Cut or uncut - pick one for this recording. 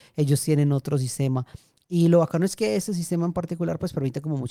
uncut